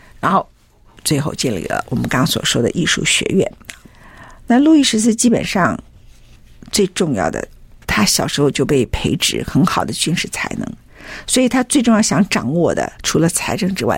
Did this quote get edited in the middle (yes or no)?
yes